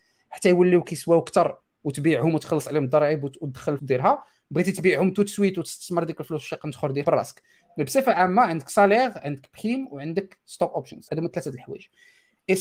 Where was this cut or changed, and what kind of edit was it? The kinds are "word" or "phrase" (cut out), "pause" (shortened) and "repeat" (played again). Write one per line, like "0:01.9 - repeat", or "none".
0:03.8 - word
0:07.0 - word
0:11.1 - word